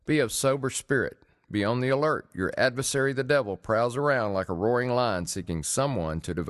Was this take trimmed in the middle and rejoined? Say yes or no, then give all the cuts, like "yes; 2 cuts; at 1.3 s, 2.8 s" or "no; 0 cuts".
no; 0 cuts